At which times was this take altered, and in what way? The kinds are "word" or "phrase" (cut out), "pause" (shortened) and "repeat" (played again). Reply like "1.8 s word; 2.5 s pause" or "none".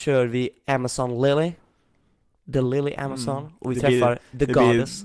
none